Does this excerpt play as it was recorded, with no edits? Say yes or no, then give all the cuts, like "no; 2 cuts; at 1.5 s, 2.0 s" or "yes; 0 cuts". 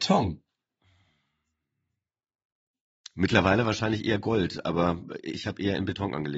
yes; 0 cuts